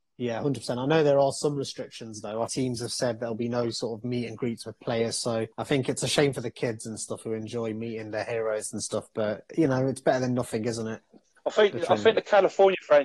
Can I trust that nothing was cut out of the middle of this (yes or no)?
no